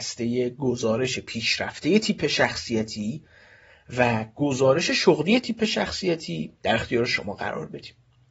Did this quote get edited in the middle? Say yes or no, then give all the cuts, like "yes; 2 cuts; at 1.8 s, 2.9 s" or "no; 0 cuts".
no; 0 cuts